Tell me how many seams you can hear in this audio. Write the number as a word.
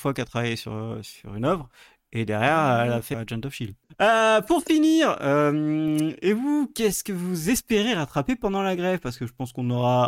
one